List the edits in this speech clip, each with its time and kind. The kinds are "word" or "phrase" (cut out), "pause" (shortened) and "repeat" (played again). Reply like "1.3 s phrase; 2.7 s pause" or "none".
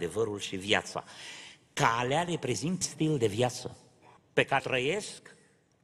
2.8 s word; 4.2 s pause; 4.6 s word